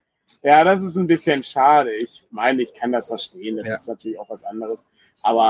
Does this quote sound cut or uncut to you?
uncut